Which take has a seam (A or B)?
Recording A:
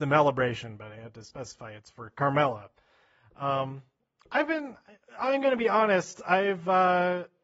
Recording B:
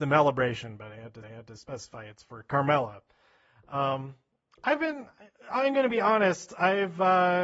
B